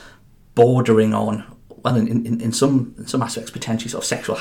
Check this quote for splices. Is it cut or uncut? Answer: uncut